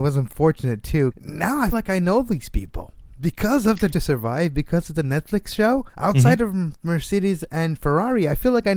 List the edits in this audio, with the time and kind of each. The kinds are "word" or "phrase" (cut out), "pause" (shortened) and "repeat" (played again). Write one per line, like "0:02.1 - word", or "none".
0:01.1 - word
0:01.7 - word
0:03.9 - word
0:05.9 - pause